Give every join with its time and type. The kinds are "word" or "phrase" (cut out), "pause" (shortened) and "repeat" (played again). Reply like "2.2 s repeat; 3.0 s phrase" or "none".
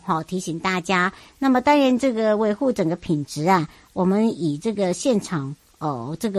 none